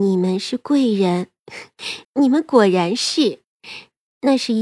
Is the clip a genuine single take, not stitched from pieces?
no; 1 cut; at 2.0 s

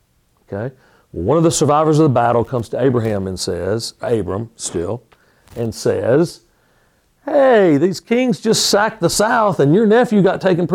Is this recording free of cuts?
yes; 0 cuts

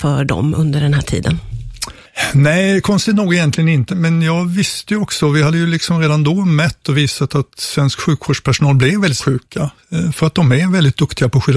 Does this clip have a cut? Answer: yes; 2 cuts; at 3.9 s, 9.2 s

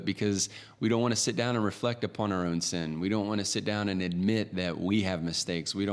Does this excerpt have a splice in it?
no; 0 cuts

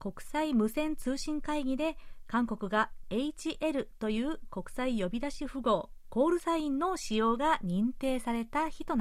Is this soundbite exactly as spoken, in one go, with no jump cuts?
yes; 0 cuts

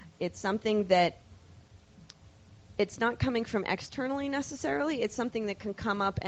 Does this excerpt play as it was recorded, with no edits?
yes; 0 cuts

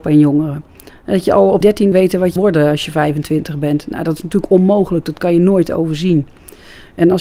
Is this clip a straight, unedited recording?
no; 3 cuts; at 1.6 s, 1.9 s, 2.4 s

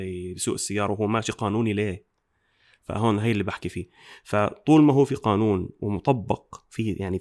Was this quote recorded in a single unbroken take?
yes; 0 cuts

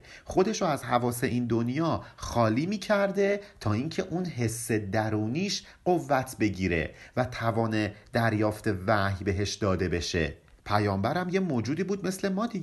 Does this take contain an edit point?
no; 0 cuts

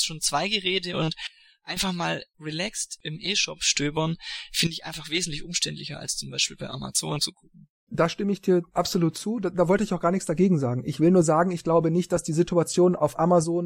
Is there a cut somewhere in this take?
no; 0 cuts

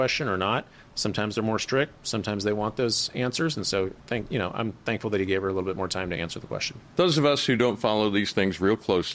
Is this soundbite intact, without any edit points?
yes; 0 cuts

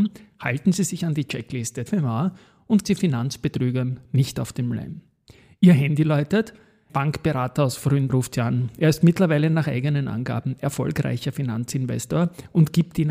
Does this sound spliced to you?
yes; 4 cuts; at 1.9 s, 2.8 s, 6.9 s, 8.1 s

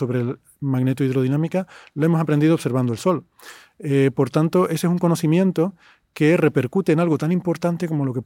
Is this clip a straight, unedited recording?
yes; 0 cuts

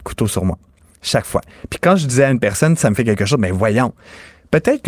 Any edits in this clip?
no; 0 cuts

